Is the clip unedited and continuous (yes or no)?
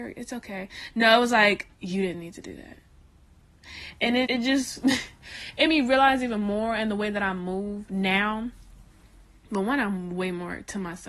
no